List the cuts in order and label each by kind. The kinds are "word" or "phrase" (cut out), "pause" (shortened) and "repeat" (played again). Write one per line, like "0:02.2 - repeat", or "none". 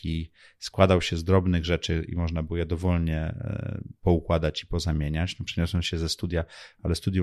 none